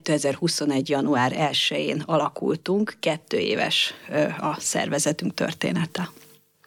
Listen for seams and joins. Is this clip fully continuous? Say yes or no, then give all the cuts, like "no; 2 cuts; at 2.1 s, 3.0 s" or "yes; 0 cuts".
yes; 0 cuts